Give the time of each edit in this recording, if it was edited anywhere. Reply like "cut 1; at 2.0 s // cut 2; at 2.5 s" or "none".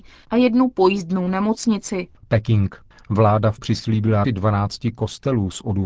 cut 1; at 2.2 s // cut 2; at 3.6 s // cut 3; at 4.2 s